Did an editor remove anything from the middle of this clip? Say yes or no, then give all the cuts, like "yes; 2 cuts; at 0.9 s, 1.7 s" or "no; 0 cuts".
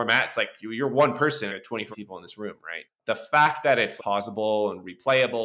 yes; 4 cuts; at 1.5 s, 1.9 s, 2.9 s, 4.0 s